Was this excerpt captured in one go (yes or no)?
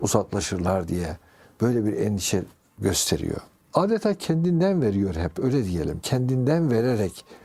yes